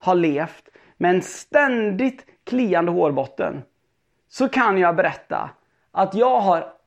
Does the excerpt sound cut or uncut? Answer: uncut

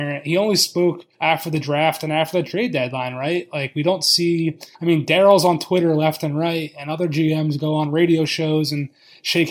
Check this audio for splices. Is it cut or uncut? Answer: cut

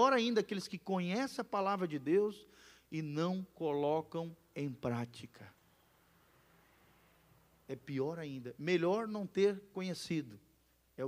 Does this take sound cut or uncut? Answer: uncut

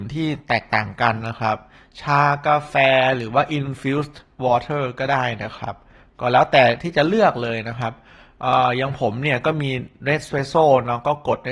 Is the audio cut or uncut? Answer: uncut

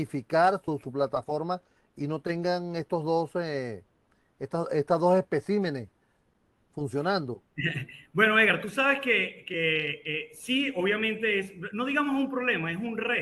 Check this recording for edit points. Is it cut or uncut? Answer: uncut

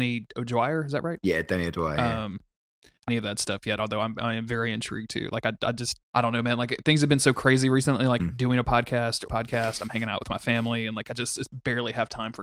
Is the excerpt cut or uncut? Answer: cut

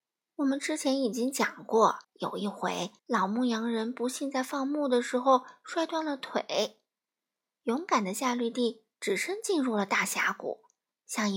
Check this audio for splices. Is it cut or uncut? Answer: cut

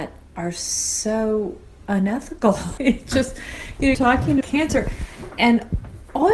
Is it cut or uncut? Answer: cut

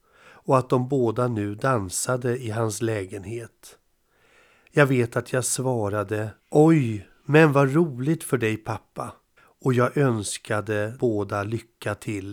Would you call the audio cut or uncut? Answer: cut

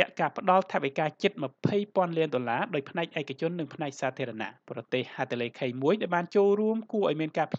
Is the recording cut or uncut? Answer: cut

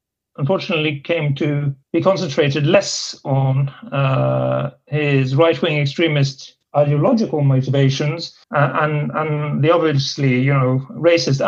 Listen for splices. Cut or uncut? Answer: cut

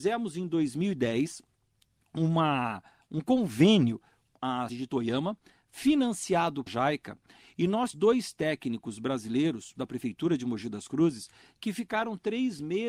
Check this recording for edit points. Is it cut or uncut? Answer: cut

